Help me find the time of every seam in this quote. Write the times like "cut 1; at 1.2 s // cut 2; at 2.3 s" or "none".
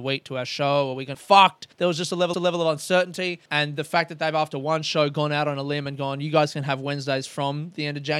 cut 1; at 1.1 s // cut 2; at 1.7 s // cut 3; at 2.3 s // cut 4; at 3.5 s